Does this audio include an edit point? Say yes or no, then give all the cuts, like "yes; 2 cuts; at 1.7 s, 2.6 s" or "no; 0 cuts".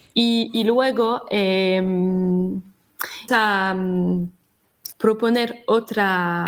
yes; 2 cuts; at 3.3 s, 4.9 s